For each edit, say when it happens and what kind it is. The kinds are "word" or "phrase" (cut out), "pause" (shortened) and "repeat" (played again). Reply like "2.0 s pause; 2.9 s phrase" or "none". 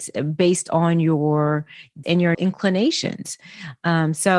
2.0 s word; 2.3 s word